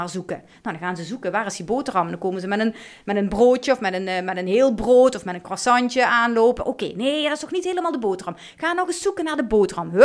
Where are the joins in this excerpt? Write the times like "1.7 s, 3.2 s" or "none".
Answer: none